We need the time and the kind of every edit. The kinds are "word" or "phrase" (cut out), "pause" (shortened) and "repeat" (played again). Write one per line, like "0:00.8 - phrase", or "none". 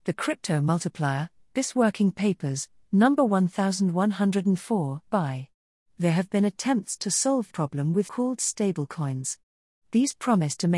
0:05.1 - word
0:07.5 - word
0:08.1 - word